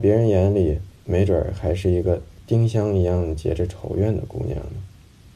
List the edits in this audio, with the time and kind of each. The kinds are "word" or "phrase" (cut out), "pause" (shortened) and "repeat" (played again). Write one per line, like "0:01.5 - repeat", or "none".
0:01.0 - pause
0:02.4 - pause